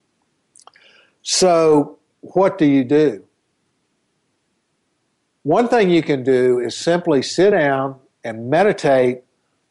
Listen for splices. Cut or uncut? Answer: uncut